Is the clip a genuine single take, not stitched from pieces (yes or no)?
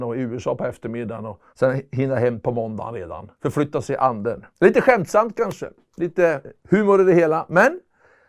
no